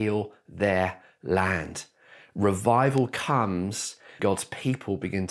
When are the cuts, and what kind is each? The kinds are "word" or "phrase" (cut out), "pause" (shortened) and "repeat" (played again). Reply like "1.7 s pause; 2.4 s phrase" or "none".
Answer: 4.2 s word